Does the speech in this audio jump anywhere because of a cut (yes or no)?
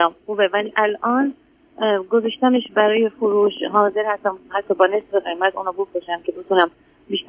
no